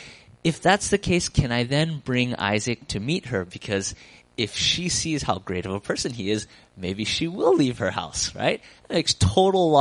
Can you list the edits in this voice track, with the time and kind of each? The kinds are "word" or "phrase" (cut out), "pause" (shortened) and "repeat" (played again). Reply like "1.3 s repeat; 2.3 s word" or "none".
none